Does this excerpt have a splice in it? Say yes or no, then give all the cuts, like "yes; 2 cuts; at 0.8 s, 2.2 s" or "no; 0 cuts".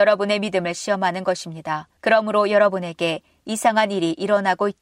no; 0 cuts